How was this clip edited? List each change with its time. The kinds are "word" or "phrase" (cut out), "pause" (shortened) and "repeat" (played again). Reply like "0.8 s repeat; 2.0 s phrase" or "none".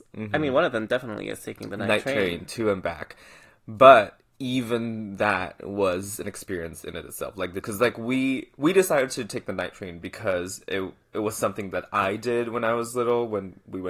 7.6 s phrase